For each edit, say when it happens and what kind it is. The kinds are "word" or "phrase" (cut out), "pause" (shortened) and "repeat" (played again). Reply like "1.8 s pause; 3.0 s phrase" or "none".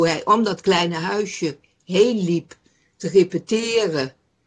none